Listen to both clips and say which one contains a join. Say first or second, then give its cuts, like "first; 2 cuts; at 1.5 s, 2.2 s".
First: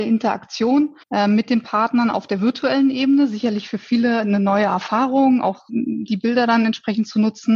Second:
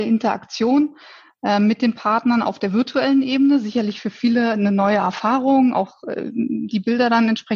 first; 2 cuts; at 1.0 s, 5.7 s